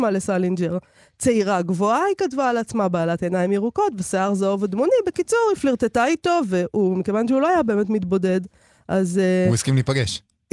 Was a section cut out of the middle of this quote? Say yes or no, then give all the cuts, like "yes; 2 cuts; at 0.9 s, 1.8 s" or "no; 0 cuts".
no; 0 cuts